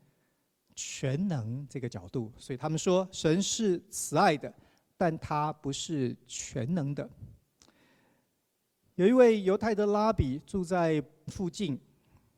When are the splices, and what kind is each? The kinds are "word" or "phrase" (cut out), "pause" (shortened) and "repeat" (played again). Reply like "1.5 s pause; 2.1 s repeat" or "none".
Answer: 11.3 s word